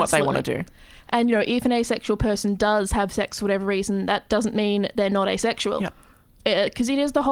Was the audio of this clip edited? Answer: no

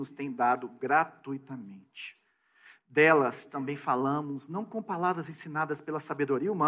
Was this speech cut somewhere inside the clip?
no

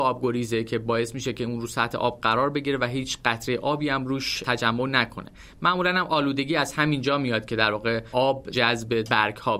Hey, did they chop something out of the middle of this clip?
no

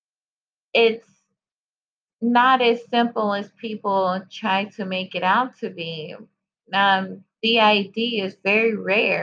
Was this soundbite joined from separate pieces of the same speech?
no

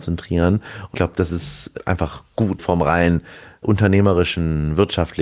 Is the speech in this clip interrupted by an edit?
yes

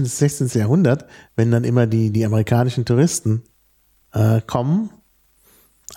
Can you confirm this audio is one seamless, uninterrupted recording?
yes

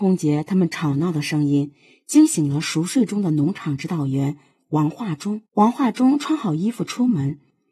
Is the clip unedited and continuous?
no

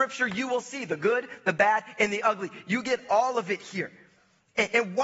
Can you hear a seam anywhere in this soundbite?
no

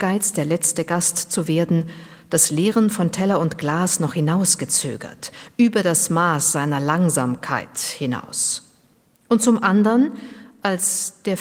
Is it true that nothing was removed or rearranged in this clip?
yes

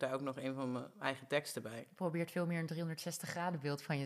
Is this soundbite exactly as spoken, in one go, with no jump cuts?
yes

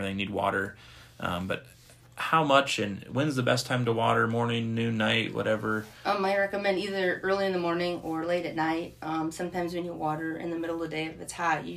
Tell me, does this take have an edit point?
no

